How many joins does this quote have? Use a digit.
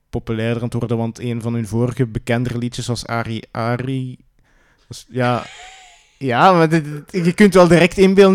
0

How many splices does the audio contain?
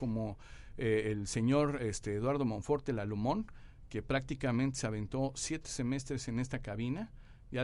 0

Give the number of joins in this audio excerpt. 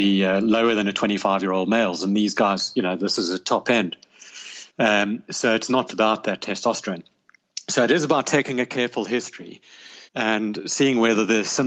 3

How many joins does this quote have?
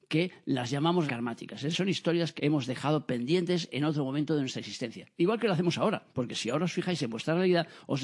4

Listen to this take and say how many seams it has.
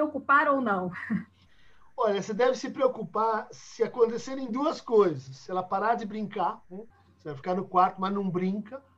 1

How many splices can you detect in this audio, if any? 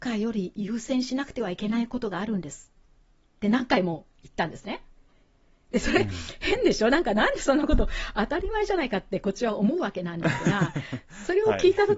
0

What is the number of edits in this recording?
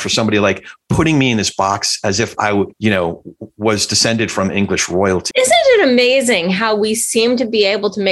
2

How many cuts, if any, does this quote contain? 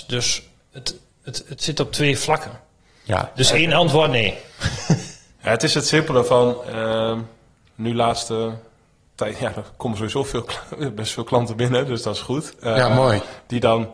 0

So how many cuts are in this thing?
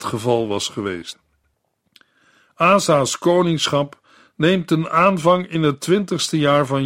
0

